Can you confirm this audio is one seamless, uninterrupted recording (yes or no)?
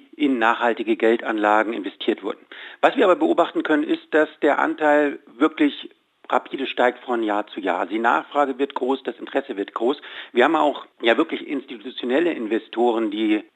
yes